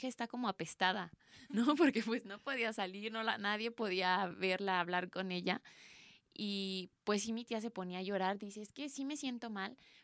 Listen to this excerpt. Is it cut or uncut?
uncut